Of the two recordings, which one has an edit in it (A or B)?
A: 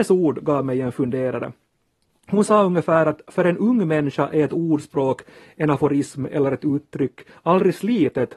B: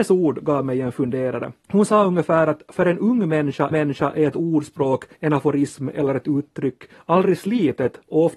B